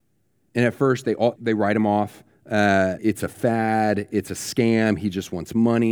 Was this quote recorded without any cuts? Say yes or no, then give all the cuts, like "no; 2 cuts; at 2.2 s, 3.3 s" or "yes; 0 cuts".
no; 2 cuts; at 1.4 s, 3.0 s